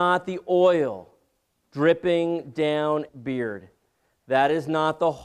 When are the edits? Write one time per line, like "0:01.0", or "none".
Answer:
0:03.1

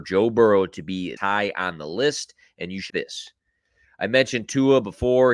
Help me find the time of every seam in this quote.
0:01.2
0:02.9

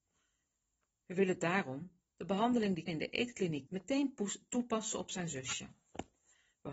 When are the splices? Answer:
0:02.9
0:03.7

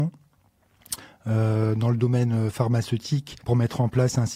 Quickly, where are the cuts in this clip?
0:03.4

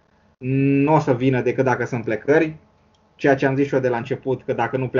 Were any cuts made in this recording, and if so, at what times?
none

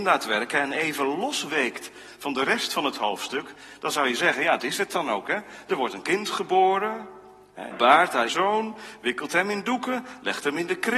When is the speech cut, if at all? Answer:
0:04.6
0:07.7
0:08.3

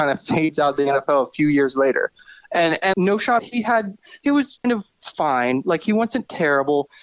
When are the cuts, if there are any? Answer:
0:02.9
0:03.4
0:04.6

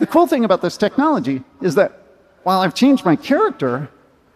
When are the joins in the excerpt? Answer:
none

